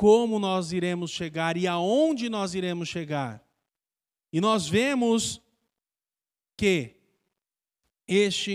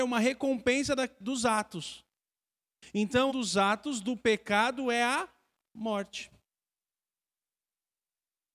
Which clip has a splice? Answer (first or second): second